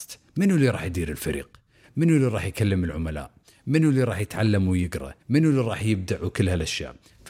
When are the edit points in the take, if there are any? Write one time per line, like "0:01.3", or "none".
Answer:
0:05.2